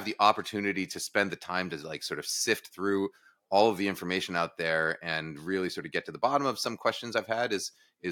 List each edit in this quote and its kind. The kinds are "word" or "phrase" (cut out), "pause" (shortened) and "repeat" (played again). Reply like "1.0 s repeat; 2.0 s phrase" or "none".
none